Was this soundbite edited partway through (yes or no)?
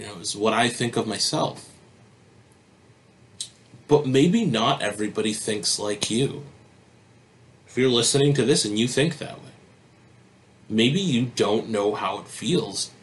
no